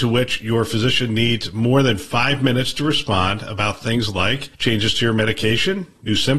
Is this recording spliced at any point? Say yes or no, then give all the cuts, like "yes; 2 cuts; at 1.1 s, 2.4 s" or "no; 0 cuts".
yes; 1 cut; at 4.5 s